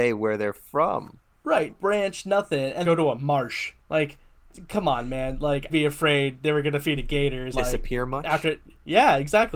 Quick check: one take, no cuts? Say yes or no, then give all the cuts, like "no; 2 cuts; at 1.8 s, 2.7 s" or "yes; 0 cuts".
no; 6 cuts; at 1.7 s, 2.8 s, 3.8 s, 5.7 s, 7.0 s, 7.5 s